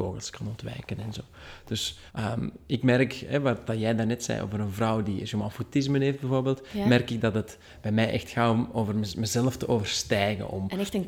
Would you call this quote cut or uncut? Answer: cut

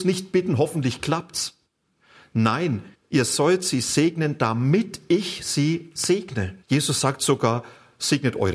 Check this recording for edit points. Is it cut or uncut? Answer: cut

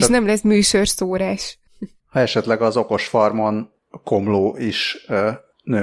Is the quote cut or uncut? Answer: uncut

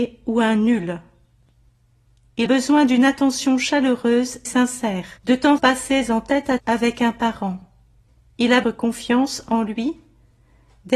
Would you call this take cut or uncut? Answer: cut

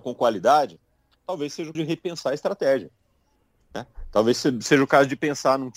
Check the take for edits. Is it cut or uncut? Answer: cut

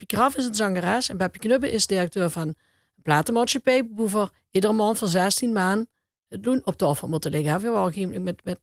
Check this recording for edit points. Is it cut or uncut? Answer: uncut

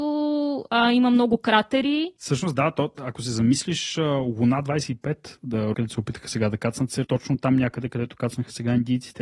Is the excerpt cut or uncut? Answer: cut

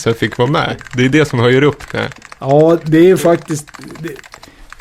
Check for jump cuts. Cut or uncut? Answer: uncut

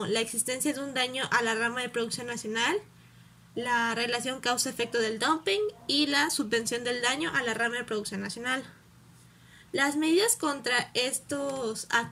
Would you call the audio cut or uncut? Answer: uncut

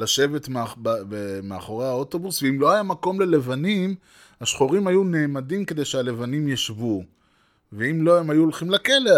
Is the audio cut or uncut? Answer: uncut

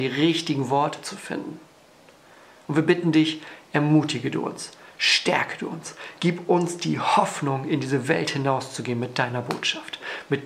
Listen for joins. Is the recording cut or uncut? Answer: uncut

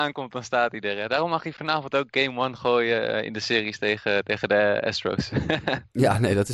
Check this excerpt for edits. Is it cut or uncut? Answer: uncut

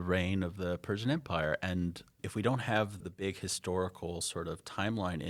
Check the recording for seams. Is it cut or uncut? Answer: cut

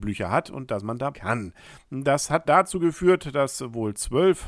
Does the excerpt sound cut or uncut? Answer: cut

